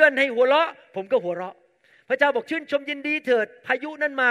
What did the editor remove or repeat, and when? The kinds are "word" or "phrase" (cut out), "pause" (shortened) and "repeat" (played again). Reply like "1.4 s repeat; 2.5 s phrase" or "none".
none